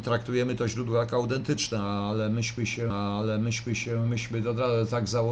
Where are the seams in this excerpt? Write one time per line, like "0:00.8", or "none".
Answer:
0:02.9